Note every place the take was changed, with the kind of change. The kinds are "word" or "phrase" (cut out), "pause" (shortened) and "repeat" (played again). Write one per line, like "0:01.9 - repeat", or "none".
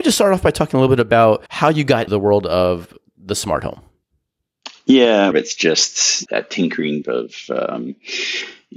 0:01.5 - pause
0:02.1 - word
0:05.3 - phrase
0:06.3 - word
0:07.0 - word